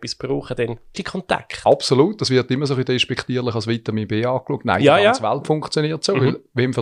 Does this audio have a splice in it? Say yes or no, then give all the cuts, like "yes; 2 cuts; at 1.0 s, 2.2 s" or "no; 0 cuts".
yes; 1 cut; at 0.9 s